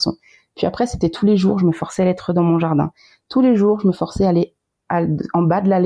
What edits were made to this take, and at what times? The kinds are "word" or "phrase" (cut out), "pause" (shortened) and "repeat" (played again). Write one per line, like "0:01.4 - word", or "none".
none